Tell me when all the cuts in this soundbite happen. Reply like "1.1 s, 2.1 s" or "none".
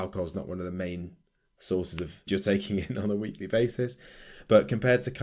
2.3 s

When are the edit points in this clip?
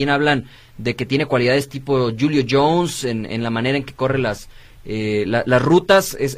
none

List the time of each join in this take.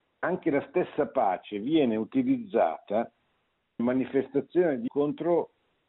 3.8 s, 4.9 s

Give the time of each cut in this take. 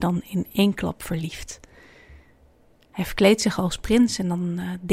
none

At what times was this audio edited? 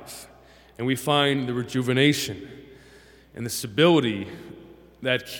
none

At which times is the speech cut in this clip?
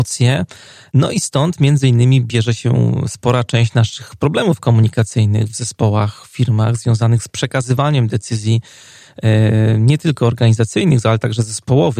none

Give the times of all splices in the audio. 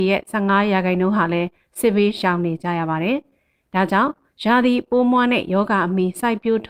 none

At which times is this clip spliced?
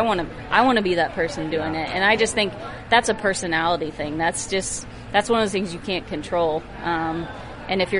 none

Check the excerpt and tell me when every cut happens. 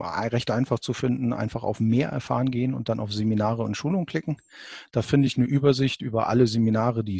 none

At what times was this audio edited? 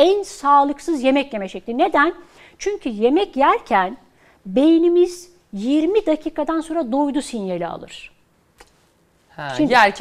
none

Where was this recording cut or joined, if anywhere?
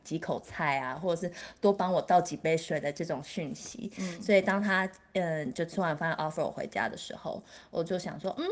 none

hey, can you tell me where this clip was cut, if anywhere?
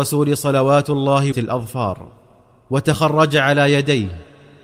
1.3 s

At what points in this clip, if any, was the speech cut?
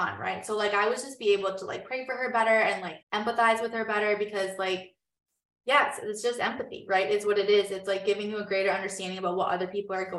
3.0 s

